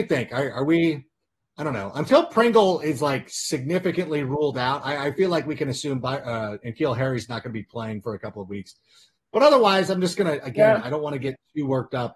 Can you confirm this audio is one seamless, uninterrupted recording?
yes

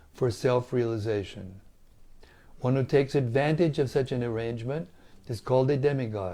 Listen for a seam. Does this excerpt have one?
no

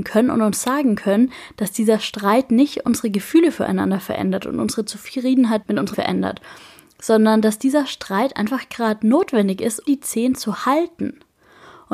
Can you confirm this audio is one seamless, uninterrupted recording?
no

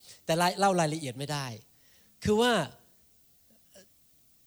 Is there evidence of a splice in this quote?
no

